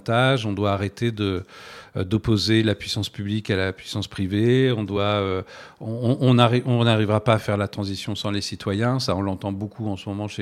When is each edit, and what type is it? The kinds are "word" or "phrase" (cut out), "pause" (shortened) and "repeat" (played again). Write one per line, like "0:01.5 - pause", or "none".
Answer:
none